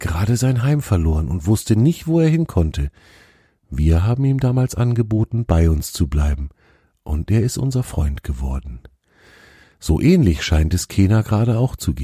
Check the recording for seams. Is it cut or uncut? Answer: uncut